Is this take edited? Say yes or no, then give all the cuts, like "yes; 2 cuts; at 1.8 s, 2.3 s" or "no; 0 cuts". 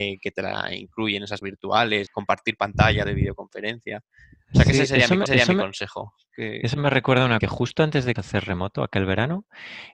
yes; 6 cuts; at 1.4 s, 2.1 s, 3.0 s, 5.3 s, 7.4 s, 8.2 s